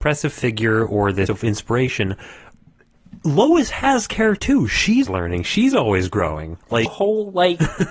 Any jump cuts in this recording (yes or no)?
yes